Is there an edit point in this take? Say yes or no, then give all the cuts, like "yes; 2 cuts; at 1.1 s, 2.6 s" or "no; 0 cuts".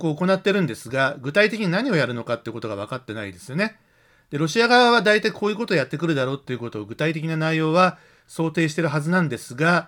no; 0 cuts